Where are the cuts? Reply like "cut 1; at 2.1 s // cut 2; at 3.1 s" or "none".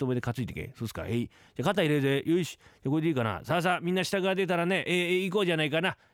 none